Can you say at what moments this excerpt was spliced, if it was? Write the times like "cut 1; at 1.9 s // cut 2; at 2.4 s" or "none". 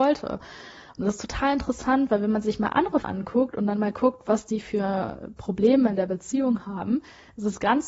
cut 1; at 3.0 s